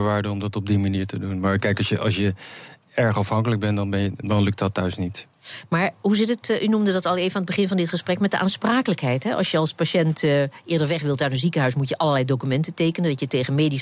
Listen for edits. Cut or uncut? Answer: cut